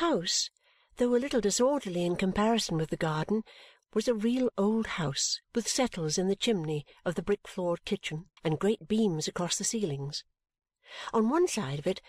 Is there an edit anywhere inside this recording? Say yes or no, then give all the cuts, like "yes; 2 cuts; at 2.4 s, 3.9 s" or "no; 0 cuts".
yes; 2 cuts; at 5.4 s, 8.4 s